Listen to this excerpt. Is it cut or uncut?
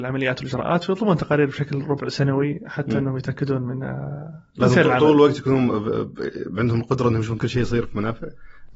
uncut